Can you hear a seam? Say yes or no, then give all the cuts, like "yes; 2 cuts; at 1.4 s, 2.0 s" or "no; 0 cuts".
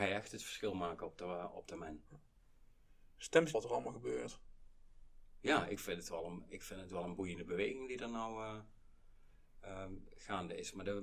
yes; 1 cut; at 3.5 s